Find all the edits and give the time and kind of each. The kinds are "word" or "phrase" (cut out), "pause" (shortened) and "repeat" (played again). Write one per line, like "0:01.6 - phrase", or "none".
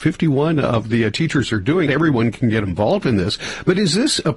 0:01.9 - phrase